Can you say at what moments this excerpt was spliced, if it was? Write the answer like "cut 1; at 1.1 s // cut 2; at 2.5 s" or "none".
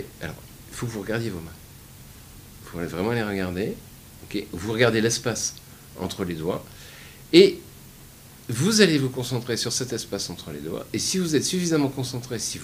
none